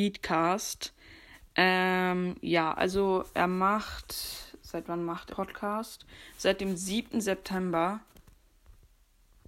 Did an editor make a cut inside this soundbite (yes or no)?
yes